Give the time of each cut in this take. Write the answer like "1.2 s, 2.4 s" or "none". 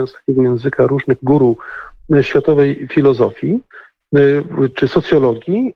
1.2 s, 4.7 s